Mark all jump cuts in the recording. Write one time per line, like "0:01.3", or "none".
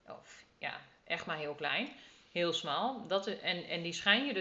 none